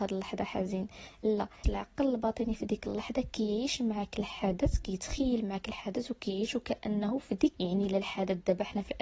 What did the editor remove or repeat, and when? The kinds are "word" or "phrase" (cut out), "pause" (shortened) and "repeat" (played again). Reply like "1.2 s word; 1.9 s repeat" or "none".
1.6 s word; 7.5 s word

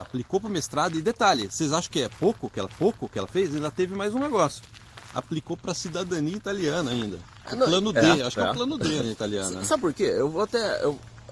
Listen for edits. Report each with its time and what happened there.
2.7 s repeat; 9.0 s word

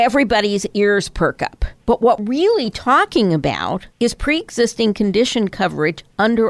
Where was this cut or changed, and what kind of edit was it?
1.8 s pause; 2.2 s word; 3.9 s pause

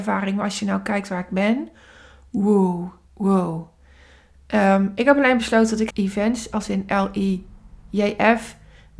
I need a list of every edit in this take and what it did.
5.9 s phrase

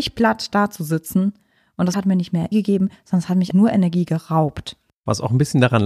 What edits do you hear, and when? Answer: 1.9 s word; 2.5 s word; 3.5 s word

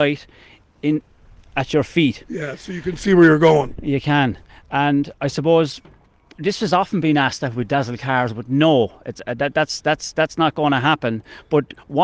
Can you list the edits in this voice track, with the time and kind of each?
none

